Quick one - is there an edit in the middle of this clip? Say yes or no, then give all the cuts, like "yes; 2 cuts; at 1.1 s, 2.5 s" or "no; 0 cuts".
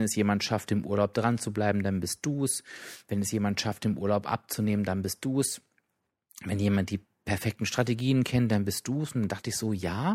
no; 0 cuts